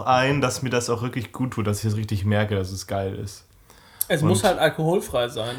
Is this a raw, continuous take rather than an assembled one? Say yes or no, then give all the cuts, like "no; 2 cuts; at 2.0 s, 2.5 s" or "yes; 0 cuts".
yes; 0 cuts